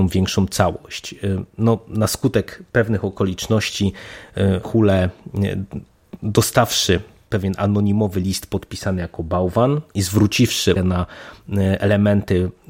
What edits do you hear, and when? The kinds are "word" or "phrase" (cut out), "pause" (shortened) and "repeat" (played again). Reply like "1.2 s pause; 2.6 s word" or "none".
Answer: 4.6 s word; 10.8 s word